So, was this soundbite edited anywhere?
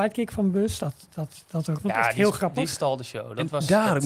yes; 1 cut; at 1.8 s

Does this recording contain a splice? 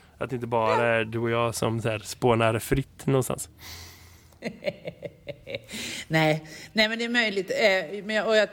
no; 0 cuts

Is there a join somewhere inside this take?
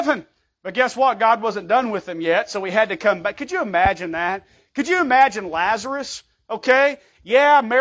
no; 0 cuts

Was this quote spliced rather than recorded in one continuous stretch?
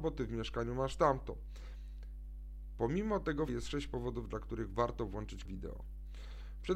yes; 2 cuts; at 3.5 s, 5.5 s

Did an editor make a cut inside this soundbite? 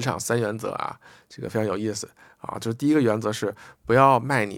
no; 0 cuts

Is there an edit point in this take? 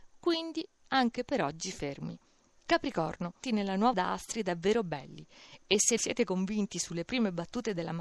yes; 3 cuts; at 3.4 s, 3.9 s, 6.0 s

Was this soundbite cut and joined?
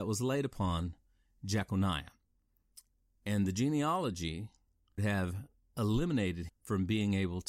yes; 2 cuts; at 5.0 s, 6.5 s

